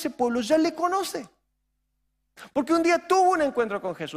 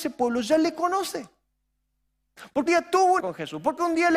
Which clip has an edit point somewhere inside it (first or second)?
second